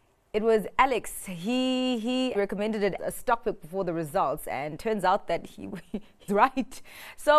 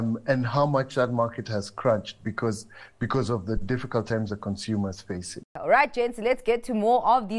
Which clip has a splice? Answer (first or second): first